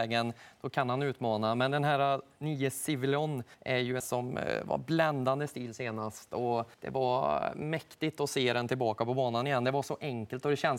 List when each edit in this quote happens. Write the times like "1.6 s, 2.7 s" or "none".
3.5 s, 4.0 s, 6.7 s